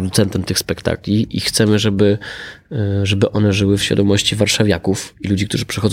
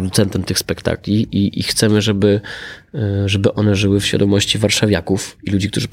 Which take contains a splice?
first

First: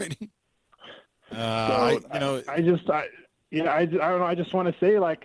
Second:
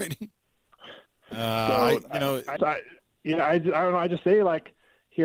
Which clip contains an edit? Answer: second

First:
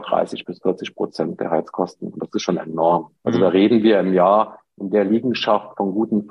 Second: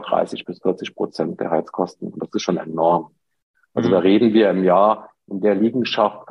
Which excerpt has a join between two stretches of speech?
first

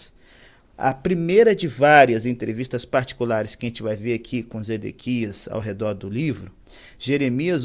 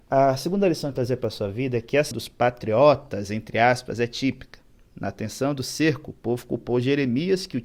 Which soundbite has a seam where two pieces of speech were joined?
second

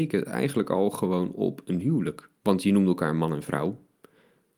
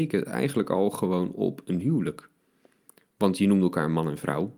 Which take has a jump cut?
first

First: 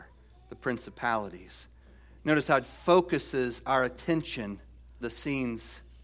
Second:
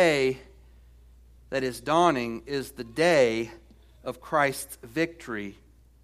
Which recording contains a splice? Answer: first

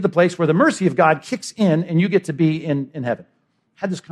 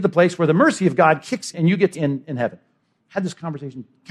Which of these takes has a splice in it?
second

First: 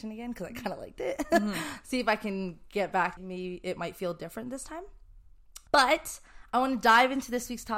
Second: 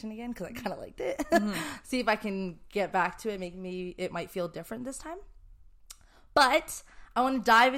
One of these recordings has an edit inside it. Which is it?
first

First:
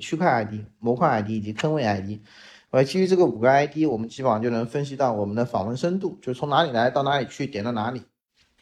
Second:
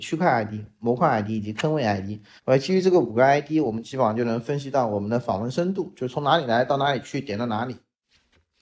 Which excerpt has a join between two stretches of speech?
second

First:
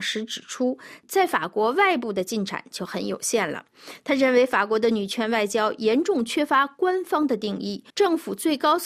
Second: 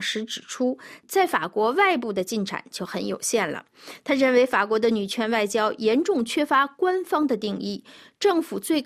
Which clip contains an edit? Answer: first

